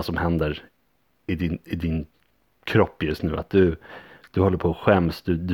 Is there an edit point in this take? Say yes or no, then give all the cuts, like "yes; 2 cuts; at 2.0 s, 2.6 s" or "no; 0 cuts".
no; 0 cuts